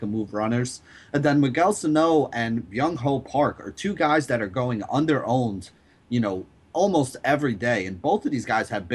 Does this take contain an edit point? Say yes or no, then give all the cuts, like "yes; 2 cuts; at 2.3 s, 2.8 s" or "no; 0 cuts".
no; 0 cuts